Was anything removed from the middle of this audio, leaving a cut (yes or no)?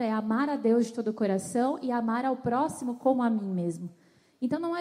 no